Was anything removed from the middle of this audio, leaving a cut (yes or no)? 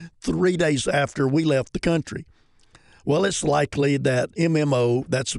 no